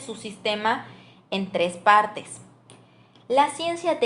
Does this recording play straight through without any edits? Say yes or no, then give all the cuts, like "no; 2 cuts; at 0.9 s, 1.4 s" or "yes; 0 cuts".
yes; 0 cuts